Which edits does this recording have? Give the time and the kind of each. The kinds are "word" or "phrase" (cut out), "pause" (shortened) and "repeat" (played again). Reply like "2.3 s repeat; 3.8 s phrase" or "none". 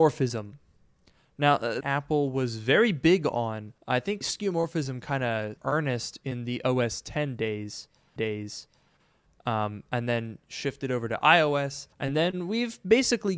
1.8 s phrase; 3.8 s pause; 4.2 s word; 5.6 s phrase; 8.2 s repeat; 11.9 s pause